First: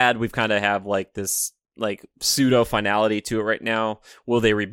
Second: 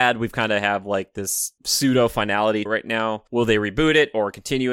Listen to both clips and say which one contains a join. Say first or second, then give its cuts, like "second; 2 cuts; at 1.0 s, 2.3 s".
second; 3 cuts; at 1.6 s, 2.7 s, 3.3 s